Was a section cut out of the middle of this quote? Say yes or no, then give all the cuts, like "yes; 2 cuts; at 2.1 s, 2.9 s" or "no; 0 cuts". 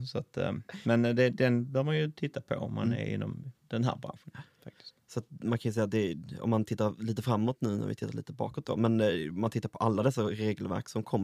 yes; 1 cut; at 5.0 s